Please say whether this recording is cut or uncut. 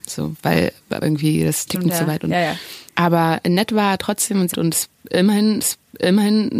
cut